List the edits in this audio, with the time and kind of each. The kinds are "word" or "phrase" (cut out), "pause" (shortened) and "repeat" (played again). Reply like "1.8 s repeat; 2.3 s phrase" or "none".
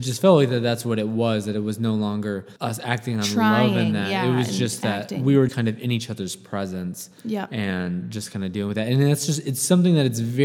2.6 s pause; 5.5 s word